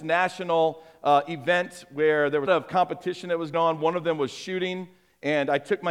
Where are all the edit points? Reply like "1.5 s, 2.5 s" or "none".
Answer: 2.5 s, 3.5 s